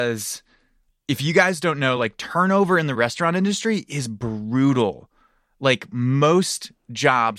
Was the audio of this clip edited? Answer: no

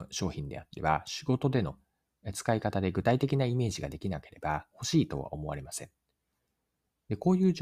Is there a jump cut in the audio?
no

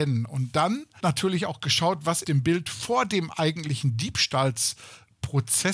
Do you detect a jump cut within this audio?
yes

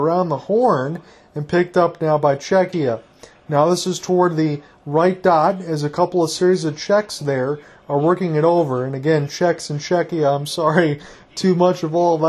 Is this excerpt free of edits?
yes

